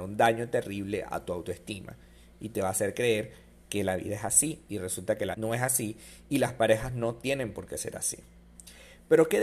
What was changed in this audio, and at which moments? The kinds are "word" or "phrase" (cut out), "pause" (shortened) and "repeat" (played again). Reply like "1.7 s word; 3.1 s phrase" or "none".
5.3 s word